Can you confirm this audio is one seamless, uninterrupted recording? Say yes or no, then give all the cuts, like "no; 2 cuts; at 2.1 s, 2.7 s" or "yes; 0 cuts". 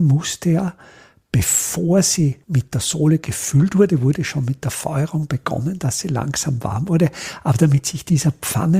no; 1 cut; at 2.4 s